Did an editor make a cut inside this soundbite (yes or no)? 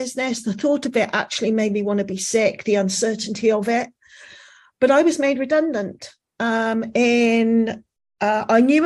no